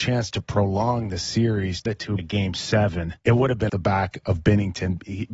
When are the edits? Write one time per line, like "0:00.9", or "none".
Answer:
0:01.9
0:02.2
0:03.2
0:03.7